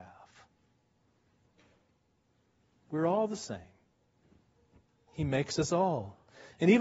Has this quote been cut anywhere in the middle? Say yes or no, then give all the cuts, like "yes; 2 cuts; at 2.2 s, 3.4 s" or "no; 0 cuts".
no; 0 cuts